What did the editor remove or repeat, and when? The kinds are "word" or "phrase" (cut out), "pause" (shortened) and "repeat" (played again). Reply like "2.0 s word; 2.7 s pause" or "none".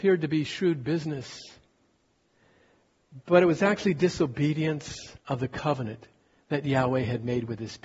5.2 s pause